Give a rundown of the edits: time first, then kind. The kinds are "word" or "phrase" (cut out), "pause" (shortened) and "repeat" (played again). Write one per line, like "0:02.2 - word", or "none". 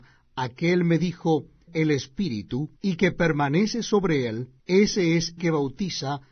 0:01.7 - phrase
0:02.8 - pause
0:04.6 - pause
0:05.4 - word